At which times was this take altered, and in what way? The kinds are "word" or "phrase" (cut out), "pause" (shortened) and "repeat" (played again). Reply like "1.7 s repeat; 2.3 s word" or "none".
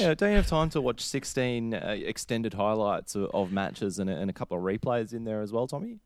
none